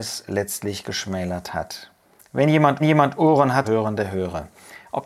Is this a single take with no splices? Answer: no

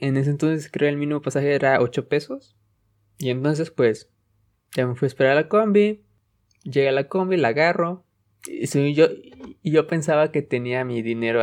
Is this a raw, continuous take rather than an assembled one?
yes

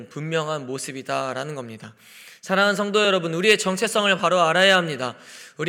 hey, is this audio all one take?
yes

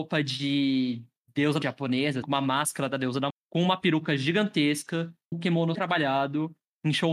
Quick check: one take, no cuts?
no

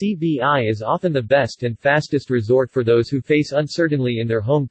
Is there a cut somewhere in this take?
no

